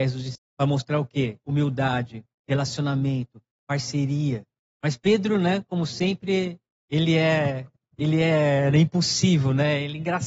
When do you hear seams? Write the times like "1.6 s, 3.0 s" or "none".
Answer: none

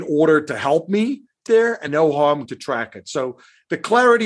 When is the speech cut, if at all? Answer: 1.5 s, 1.9 s, 2.5 s

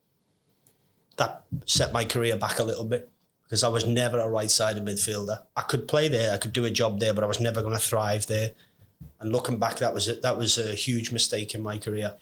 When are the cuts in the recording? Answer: none

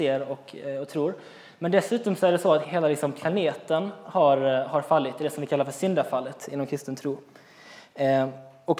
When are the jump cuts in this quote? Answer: 2.6 s

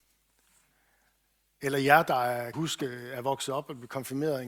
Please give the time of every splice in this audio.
2.5 s

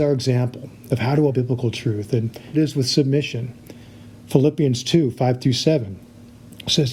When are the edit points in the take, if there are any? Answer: 1.3 s, 2.5 s

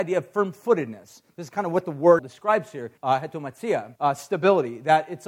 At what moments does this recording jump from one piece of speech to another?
2.2 s, 3.0 s, 4.0 s

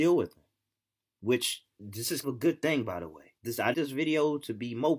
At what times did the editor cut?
2.2 s, 3.4 s, 3.7 s

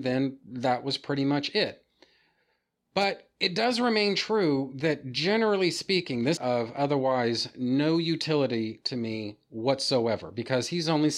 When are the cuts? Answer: 6.4 s

